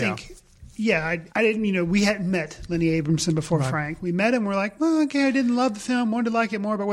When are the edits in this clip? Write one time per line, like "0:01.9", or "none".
0:01.3